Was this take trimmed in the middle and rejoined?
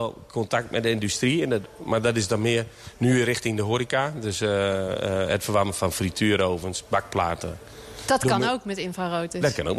no; 0 cuts

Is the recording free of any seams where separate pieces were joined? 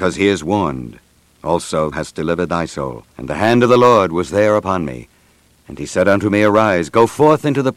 no; 2 cuts; at 1.9 s, 3.1 s

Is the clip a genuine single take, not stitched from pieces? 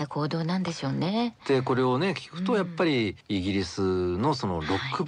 no; 1 cut; at 3.2 s

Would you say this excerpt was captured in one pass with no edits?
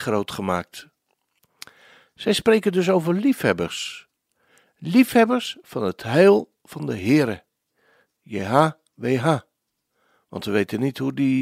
yes; 0 cuts

